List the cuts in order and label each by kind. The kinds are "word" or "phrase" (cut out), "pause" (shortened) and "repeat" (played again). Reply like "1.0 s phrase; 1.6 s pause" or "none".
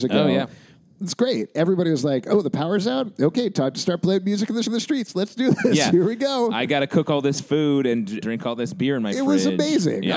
4.7 s repeat; 8.2 s word